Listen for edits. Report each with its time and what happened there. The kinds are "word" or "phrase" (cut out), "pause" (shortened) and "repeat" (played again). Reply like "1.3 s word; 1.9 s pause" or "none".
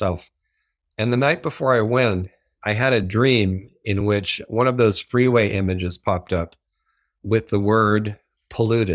none